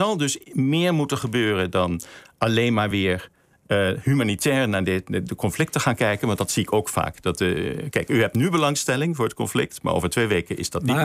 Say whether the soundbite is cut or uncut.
uncut